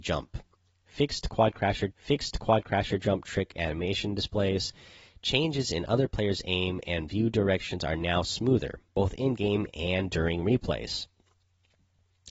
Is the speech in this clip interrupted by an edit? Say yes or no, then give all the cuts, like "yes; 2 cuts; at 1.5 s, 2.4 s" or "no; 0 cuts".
yes; 1 cut; at 1.9 s